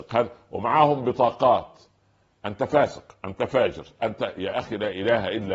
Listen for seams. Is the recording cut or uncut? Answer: uncut